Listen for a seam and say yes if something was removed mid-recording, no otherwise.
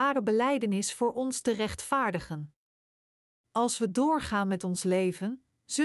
no